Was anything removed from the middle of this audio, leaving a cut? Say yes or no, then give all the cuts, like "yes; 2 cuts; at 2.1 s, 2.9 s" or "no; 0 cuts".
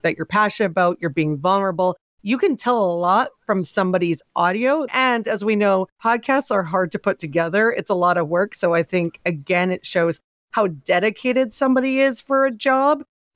yes; 1 cut; at 5.9 s